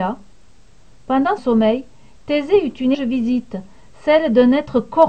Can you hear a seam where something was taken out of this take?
yes; 2 cuts; at 1.4 s, 2.9 s

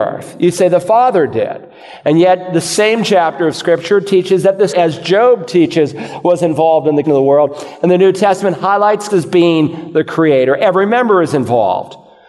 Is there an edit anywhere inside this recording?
yes; 3 cuts; at 4.7 s, 7.0 s, 9.1 s

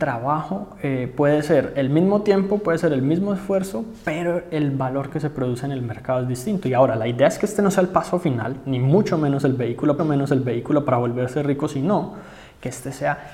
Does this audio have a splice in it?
yes; 1 cut; at 10.0 s

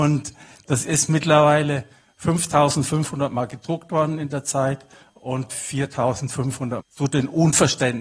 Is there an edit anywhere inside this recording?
yes; 1 cut; at 6.8 s

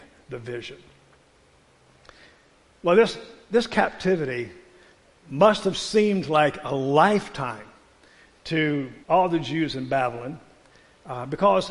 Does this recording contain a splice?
yes; 1 cut; at 9.0 s

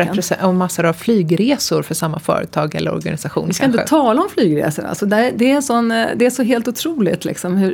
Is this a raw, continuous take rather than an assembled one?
yes; 0 cuts

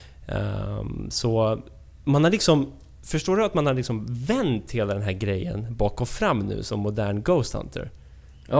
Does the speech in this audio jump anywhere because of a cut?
no; 0 cuts

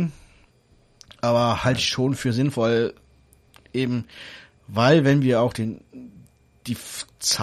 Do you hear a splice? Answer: no; 0 cuts

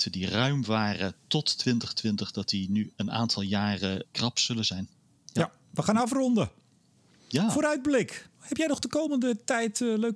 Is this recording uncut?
no; 2 cuts; at 2.9 s, 4.1 s

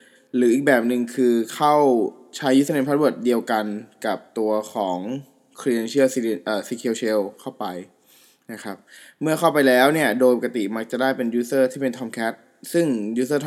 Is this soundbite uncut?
yes; 0 cuts

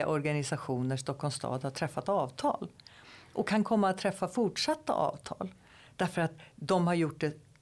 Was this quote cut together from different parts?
no; 0 cuts

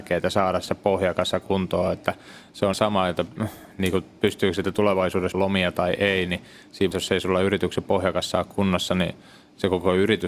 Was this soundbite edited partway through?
yes; 3 cuts; at 2.7 s, 5.3 s, 6.9 s

